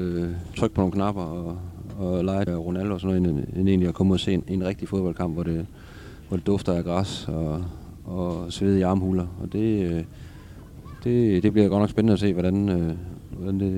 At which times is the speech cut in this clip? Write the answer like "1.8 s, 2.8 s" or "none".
2.5 s